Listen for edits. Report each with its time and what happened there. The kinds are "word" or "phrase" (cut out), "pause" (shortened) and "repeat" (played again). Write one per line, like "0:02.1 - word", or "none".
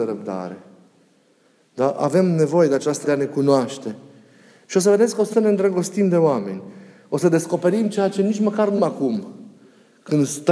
0:03.0 - word
0:05.3 - word
0:08.8 - word